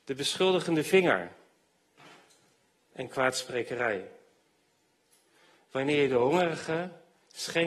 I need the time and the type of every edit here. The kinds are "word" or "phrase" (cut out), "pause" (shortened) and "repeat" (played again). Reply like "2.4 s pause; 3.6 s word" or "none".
none